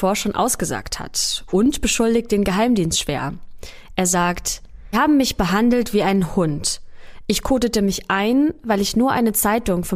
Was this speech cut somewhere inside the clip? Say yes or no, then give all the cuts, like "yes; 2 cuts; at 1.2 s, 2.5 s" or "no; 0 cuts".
yes; 1 cut; at 4.9 s